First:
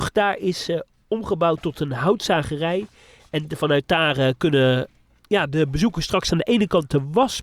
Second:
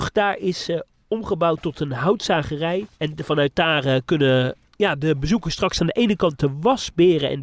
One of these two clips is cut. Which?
second; 2 cuts; at 2.9 s, 4.6 s

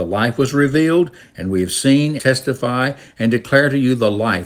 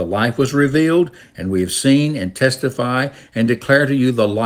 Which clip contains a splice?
first; 1 cut; at 2.2 s

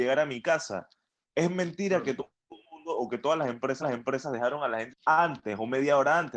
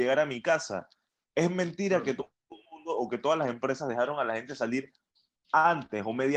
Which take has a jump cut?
first; 2 cuts; at 3.8 s, 4.9 s

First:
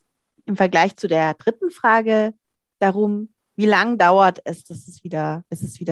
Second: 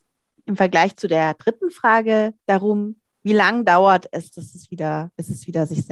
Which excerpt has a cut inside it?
second; 1 cut; at 2.4 s

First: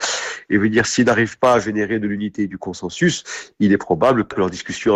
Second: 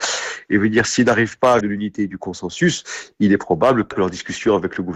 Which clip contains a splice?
second; 1 cut; at 1.6 s

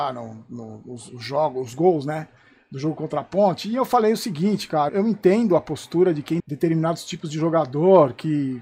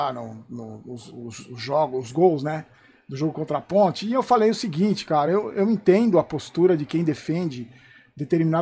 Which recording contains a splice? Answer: first; 3 cuts; at 1.1 s, 4.9 s, 6.4 s

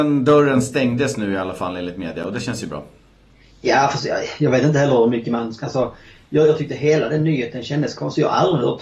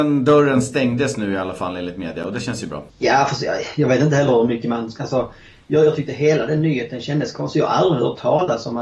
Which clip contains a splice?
second; 1 cut; at 2.9 s

